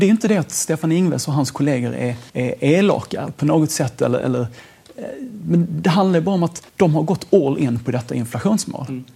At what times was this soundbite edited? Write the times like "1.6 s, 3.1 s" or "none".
2.3 s, 6.7 s